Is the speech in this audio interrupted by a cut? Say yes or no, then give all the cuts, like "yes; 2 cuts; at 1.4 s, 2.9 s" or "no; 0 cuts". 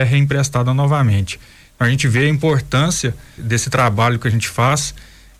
yes; 1 cut; at 3.4 s